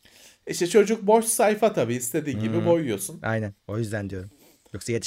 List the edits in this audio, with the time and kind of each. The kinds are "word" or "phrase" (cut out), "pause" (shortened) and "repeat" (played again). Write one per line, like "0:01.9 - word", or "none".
0:03.6 - pause

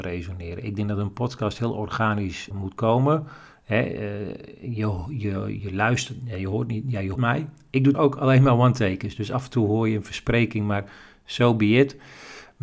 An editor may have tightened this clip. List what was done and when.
0:02.5 - word
0:05.6 - word
0:07.2 - word
0:07.9 - word

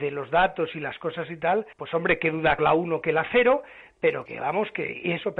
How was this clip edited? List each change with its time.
0:01.7 - pause
0:02.6 - phrase
0:04.3 - word

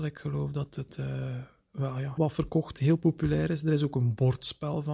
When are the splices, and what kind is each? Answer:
0:02.2 - word
0:02.7 - word

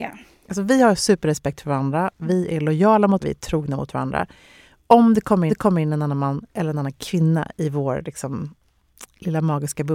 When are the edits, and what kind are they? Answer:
0:03.2 - word
0:05.5 - repeat

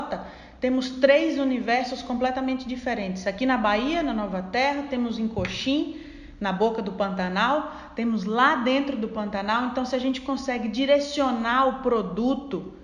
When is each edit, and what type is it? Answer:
none

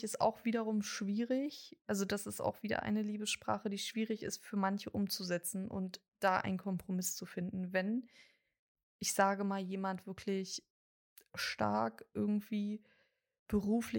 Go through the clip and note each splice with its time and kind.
none

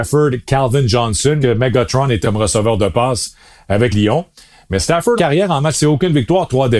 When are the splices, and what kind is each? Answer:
0:01.4 - word
0:02.2 - word
0:03.9 - word
0:05.2 - word
0:05.7 - word

